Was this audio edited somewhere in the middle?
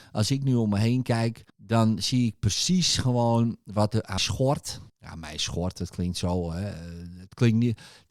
yes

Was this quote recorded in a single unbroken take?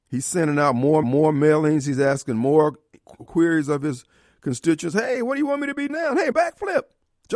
no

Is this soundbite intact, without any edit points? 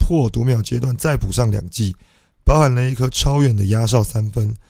yes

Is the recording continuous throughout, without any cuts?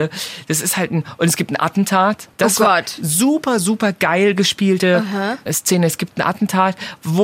no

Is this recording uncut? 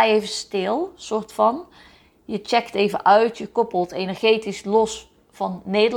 yes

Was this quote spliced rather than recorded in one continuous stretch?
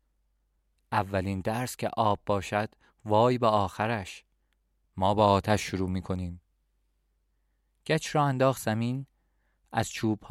no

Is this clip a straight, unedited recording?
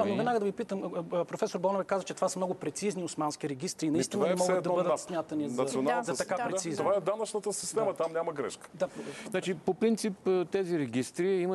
yes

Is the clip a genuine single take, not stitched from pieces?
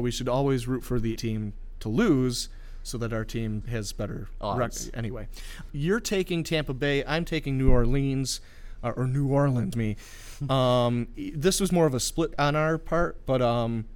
no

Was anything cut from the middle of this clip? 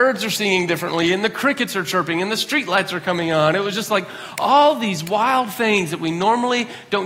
no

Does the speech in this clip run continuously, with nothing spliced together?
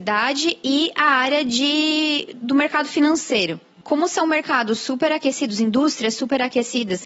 yes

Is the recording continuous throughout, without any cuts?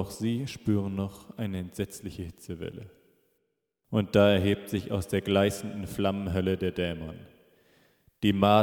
yes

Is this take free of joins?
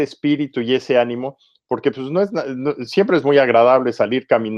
yes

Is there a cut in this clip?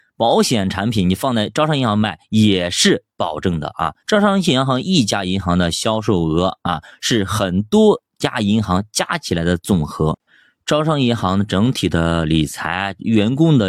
yes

